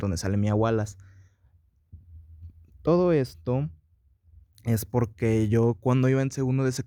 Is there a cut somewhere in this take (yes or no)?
no